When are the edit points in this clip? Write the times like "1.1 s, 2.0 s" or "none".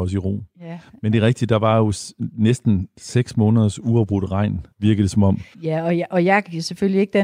4.7 s, 5.5 s